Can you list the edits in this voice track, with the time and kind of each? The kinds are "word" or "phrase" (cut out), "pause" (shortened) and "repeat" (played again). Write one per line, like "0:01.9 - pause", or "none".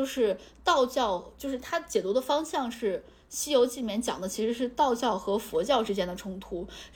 none

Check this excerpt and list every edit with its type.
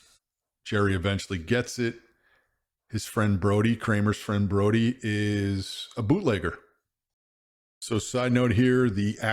none

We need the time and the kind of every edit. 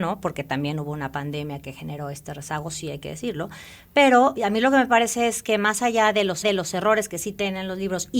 0:04.4 - word
0:06.4 - repeat

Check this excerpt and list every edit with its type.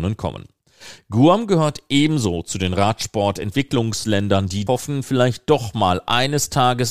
0:04.7 - word

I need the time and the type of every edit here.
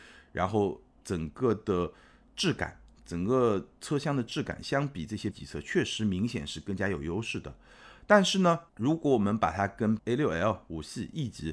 0:05.3 - word
0:08.7 - pause
0:10.0 - word

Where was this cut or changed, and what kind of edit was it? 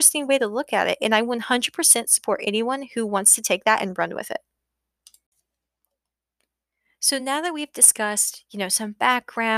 none

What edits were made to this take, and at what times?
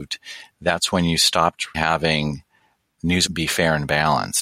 0:01.7 - word
0:03.3 - word

